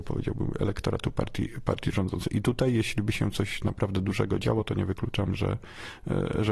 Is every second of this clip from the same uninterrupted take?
yes; 0 cuts

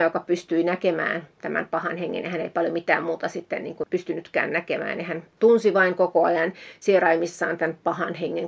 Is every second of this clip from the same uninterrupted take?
yes; 0 cuts

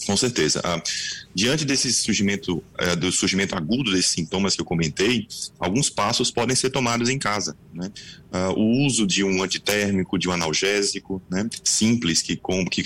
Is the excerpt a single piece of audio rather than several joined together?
yes; 0 cuts

